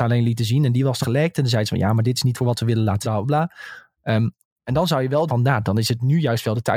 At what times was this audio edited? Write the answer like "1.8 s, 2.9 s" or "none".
1.0 s, 2.3 s, 3.0 s, 5.3 s